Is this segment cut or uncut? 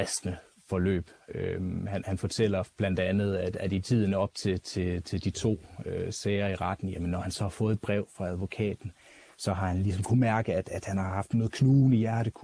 uncut